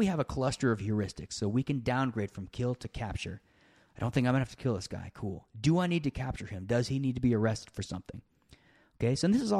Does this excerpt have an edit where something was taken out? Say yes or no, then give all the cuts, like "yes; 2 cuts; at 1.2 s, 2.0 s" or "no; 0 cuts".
no; 0 cuts